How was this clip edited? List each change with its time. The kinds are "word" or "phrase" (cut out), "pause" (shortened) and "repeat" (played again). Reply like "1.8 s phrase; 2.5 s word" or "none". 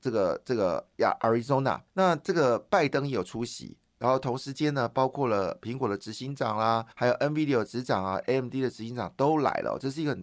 1.9 s pause; 6.9 s pause